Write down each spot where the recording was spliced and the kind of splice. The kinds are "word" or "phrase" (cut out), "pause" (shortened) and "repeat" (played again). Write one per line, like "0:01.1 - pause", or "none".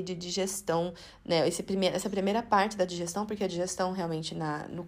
none